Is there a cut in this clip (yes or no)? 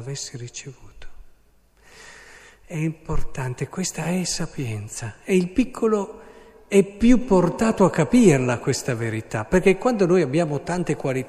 no